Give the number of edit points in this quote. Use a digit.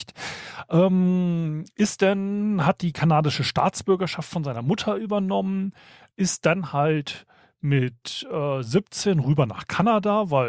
0